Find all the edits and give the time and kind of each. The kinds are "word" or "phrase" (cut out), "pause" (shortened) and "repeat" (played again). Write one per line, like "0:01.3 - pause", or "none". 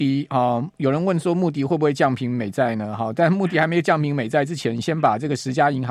none